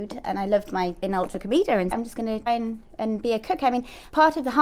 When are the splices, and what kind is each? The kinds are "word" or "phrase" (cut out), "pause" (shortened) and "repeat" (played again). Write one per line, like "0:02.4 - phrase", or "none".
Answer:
0:01.0 - word
0:01.9 - phrase
0:02.5 - word

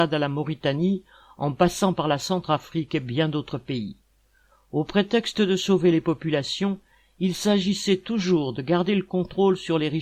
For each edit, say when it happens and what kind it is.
none

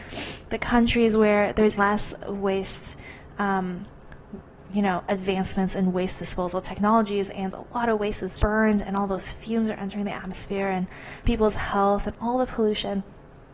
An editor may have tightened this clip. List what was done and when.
0:01.8 - word
0:08.4 - word
0:11.3 - word

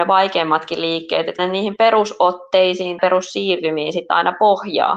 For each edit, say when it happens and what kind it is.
0:01.4 - word
0:03.0 - word

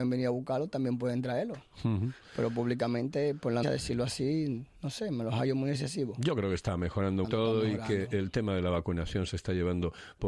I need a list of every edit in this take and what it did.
0:03.6 - word
0:04.8 - pause
0:07.2 - phrase

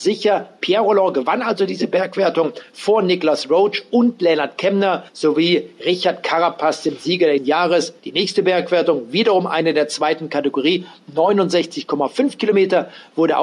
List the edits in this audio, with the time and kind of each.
0:05.1 - pause
0:07.4 - phrase
0:08.0 - pause

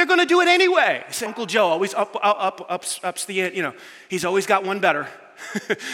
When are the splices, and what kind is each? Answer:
0:01.3 - word

